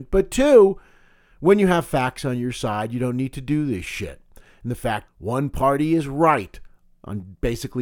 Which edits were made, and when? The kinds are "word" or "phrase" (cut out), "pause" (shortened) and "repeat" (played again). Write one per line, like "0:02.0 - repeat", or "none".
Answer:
0:05.1 - word